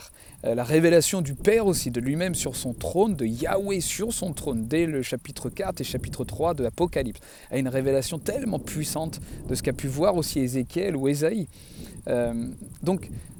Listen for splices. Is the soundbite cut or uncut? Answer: uncut